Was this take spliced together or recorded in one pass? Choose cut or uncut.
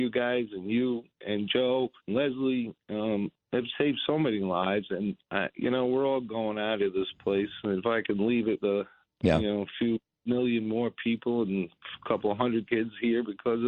cut